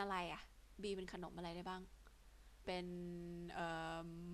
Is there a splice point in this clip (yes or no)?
yes